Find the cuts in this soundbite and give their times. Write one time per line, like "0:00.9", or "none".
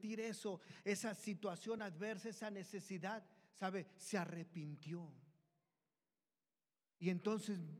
none